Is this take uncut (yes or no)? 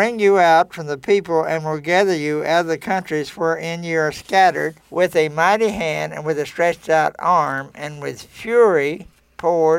no